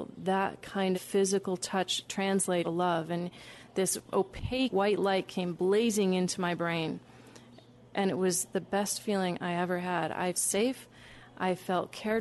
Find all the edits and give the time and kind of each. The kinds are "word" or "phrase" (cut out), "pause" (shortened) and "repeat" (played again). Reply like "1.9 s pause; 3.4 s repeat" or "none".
0.9 s word; 2.6 s word; 4.7 s word; 10.3 s word